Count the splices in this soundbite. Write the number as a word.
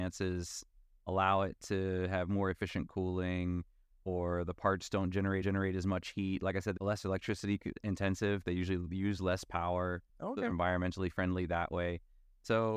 four